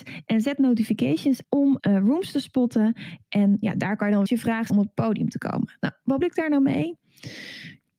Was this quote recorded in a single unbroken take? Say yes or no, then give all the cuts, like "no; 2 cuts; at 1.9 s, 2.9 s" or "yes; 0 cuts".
no; 6 cuts; at 1.4 s, 1.8 s, 3.6 s, 4.3 s, 4.7 s, 6.2 s